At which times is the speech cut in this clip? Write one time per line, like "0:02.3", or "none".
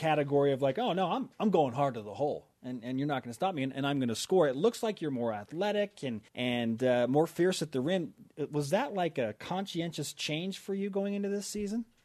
0:06.3